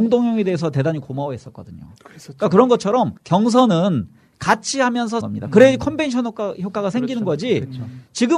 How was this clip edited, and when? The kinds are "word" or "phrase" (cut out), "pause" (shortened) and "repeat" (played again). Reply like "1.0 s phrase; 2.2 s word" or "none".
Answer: 3.2 s pause; 5.2 s phrase